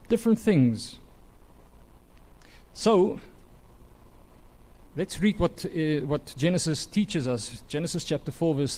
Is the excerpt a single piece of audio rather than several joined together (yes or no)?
yes